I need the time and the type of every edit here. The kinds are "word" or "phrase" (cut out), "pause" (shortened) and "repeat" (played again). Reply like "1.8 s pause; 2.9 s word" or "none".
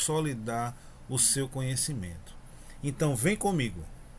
none